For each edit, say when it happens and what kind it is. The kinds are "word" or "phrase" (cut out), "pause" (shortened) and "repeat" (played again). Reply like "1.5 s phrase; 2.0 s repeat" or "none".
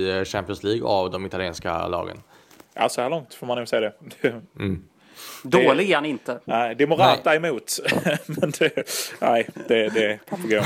none